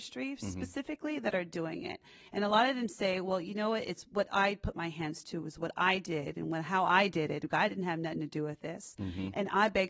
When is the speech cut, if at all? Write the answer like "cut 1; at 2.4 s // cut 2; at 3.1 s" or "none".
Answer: none